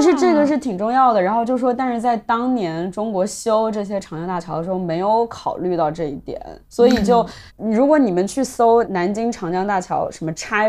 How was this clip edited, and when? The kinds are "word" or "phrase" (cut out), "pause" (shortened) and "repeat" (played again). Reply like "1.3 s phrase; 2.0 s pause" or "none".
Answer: 6.6 s pause; 7.5 s pause